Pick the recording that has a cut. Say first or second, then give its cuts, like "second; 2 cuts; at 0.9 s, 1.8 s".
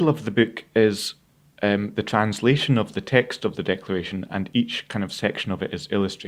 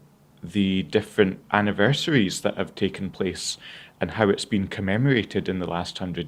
second; 1 cut; at 1.4 s